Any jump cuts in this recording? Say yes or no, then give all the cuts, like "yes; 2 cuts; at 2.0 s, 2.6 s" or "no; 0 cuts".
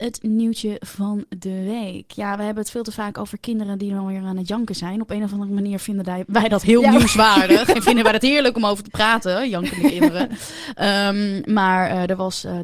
no; 0 cuts